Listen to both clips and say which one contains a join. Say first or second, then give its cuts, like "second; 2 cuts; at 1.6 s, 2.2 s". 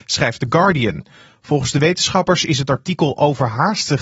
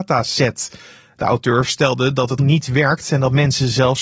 second; 1 cut; at 2.4 s